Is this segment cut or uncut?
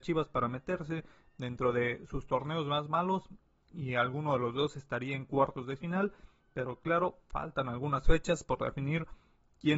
uncut